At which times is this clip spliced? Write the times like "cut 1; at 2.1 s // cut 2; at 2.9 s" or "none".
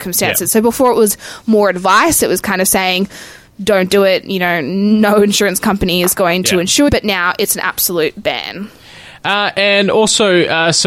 cut 1; at 6.9 s